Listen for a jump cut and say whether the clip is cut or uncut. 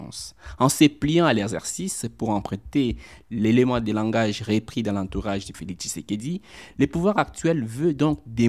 cut